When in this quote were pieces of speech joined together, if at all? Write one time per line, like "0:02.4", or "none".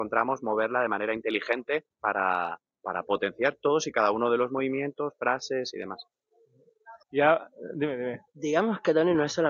0:01.9
0:07.0
0:08.3